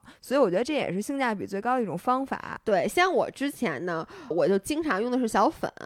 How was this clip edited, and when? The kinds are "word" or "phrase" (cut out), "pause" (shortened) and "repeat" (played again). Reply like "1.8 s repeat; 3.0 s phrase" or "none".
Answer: 4.3 s word